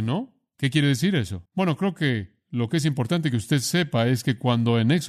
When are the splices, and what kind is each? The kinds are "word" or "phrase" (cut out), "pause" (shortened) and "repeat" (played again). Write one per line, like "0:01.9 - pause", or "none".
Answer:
0:01.5 - pause